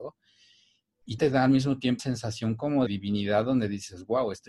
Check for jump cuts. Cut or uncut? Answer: cut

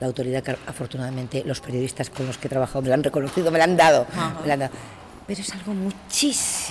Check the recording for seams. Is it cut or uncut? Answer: uncut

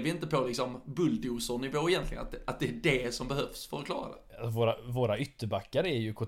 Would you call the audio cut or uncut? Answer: uncut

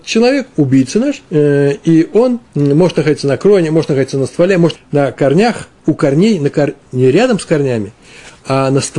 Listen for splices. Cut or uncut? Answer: cut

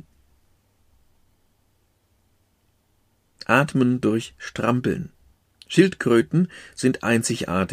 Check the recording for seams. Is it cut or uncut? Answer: cut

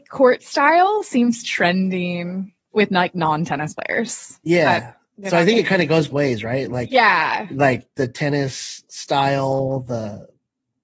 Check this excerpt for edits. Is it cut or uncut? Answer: cut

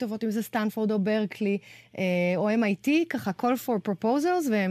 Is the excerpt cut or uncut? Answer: uncut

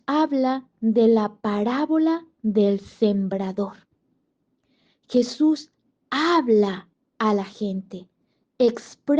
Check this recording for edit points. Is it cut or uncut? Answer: uncut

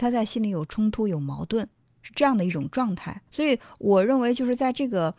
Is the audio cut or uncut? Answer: cut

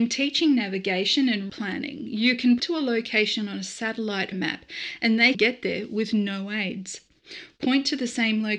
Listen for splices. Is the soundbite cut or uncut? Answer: cut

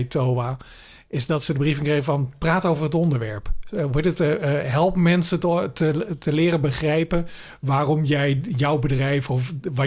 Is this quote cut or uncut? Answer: uncut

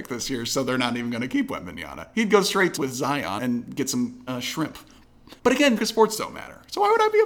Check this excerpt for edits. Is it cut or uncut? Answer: cut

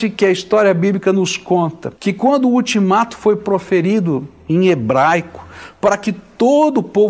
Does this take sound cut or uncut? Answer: cut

